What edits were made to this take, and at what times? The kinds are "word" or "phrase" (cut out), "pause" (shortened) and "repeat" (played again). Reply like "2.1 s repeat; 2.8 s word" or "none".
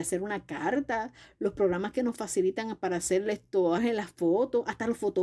3.8 s word